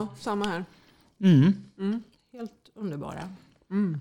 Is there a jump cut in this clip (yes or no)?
no